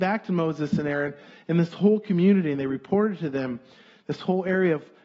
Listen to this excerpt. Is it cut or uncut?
uncut